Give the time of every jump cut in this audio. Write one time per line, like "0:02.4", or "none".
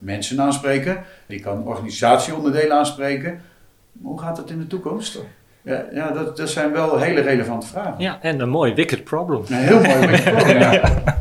0:01.3

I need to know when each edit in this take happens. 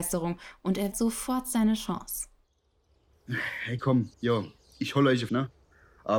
0:00.9
0:03.8
0:04.1
0:05.3

